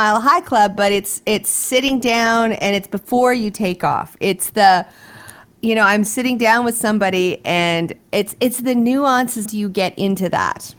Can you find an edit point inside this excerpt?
yes; 1 cut; at 9.4 s

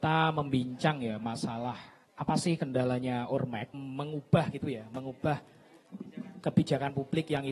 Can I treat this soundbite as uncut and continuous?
no; 2 cuts; at 2.0 s, 3.7 s

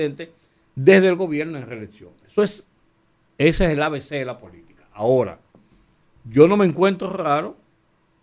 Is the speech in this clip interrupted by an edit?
no; 0 cuts

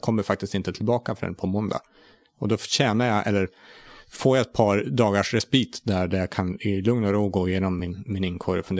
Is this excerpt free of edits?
yes; 0 cuts

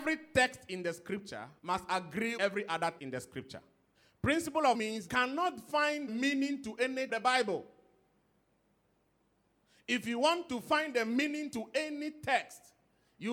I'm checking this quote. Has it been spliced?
yes; 8 cuts; at 1.6 s, 2.4 s, 3.0 s, 3.9 s, 4.7 s, 5.1 s, 6.1 s, 7.1 s

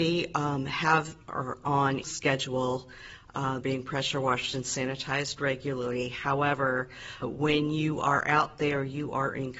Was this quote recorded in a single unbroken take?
no; 4 cuts; at 1.6 s, 2.0 s, 3.6 s, 7.2 s

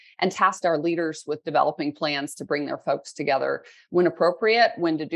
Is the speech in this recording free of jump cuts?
yes; 0 cuts

